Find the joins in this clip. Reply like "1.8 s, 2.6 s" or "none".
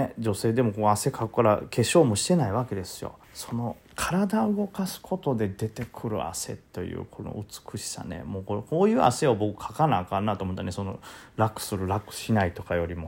3.2 s, 6.7 s